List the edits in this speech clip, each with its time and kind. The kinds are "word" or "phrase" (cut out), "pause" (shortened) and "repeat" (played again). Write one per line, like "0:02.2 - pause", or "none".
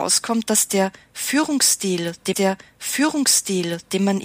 0:02.3 - repeat